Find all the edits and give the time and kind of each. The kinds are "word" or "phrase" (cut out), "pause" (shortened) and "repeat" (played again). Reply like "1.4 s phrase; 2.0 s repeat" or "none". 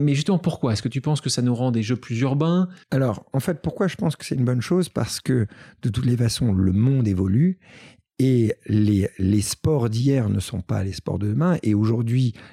none